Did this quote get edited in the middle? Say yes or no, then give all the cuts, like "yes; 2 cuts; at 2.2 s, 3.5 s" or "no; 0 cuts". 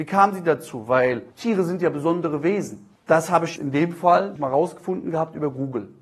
yes; 4 cuts; at 1.3 s, 3.0 s, 3.6 s, 4.4 s